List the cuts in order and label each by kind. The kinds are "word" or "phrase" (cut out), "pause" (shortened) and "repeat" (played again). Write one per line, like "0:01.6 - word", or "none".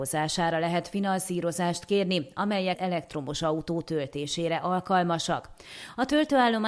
0:02.7 - phrase